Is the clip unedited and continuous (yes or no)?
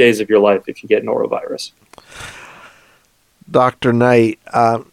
yes